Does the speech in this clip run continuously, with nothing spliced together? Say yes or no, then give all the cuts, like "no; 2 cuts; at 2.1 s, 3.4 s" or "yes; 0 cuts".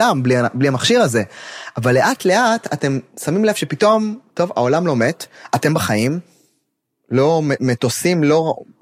yes; 0 cuts